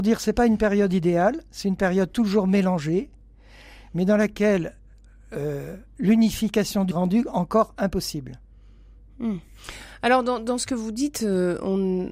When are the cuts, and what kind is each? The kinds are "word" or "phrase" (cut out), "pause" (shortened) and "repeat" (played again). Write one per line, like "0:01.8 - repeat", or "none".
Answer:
0:06.9 - phrase

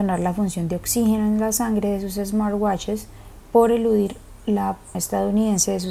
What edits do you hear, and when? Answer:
0:04.9 - word

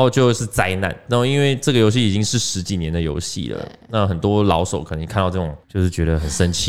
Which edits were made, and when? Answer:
0:05.6 - pause

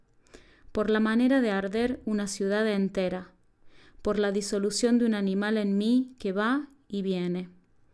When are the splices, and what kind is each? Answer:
none

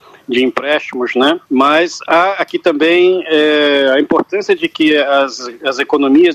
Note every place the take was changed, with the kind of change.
0:01.4 - pause

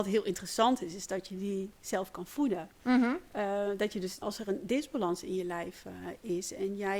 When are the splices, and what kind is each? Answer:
0:04.2 - word

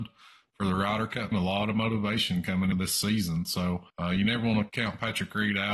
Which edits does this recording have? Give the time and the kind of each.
0:01.3 - word
0:02.7 - word
0:03.9 - pause
0:04.7 - word

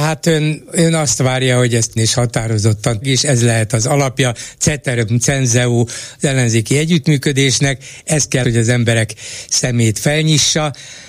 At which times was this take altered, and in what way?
0:02.0 - phrase
0:03.0 - phrase
0:08.4 - word

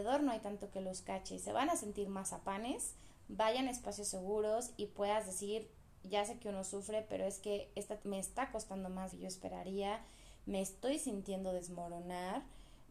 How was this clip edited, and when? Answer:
0:08.0 - word
0:09.1 - phrase

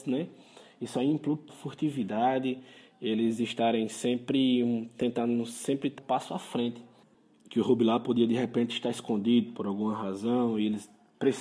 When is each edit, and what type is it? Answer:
0:01.5 - phrase
0:06.0 - word

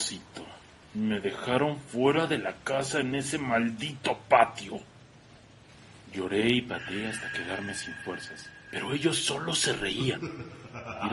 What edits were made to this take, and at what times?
none

